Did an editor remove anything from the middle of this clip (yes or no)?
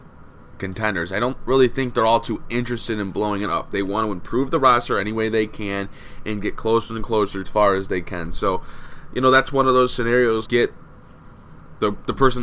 yes